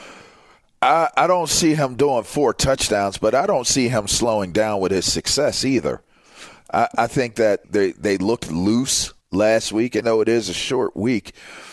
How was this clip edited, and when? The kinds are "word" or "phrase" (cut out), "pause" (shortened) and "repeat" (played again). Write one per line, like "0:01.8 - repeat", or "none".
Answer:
0:07.6 - word
0:09.2 - pause
0:10.0 - word

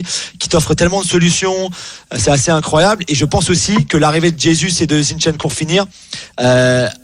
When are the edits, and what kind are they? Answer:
0:05.4 - word

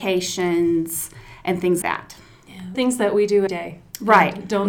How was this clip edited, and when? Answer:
0:01.8 - word
0:02.7 - word
0:03.5 - word

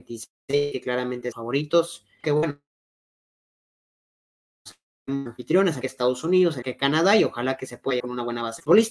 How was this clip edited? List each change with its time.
0:01.3 - word
0:02.2 - word
0:05.8 - word
0:06.6 - word
0:08.0 - word

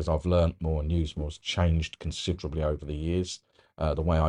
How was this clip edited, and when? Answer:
none

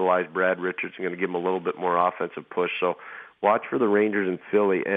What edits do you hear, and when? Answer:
none

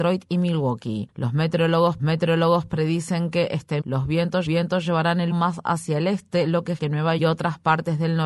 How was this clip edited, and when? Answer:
0:02.0 - repeat
0:03.8 - word
0:04.5 - repeat
0:05.3 - word
0:06.8 - word
0:07.2 - phrase

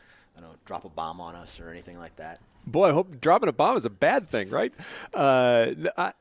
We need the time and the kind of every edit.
none

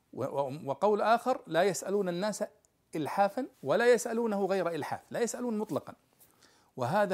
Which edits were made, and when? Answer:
0:03.5 - pause

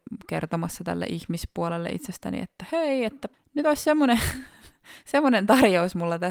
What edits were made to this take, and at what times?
0:03.3 - pause

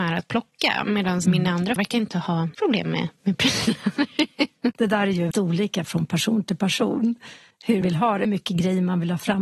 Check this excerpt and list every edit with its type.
0:01.2 - word
0:01.8 - word
0:02.5 - word
0:04.7 - word
0:05.3 - word
0:07.8 - word
0:08.2 - word

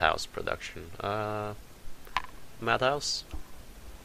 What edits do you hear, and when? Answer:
0:02.6 - phrase

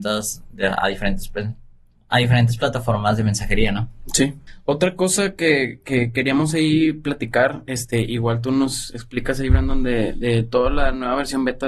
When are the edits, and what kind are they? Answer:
none

